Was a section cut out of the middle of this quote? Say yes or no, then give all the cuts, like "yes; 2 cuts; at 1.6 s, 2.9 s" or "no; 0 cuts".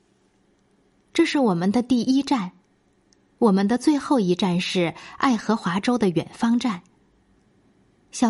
no; 0 cuts